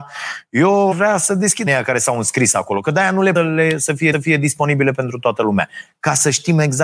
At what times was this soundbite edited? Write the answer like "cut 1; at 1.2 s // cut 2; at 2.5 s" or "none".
cut 1; at 0.9 s // cut 2; at 1.7 s // cut 3; at 3.3 s // cut 4; at 4.1 s